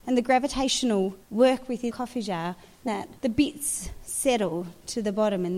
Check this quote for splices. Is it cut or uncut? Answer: cut